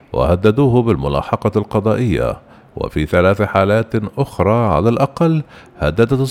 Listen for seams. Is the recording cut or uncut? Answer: uncut